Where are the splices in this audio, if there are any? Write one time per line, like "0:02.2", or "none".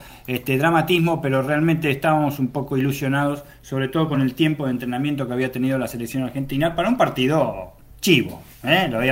none